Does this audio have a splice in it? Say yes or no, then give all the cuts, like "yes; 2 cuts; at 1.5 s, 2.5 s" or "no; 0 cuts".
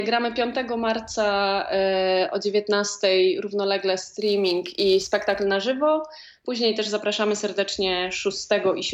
no; 0 cuts